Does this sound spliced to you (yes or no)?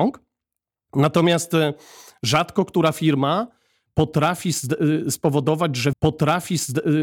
yes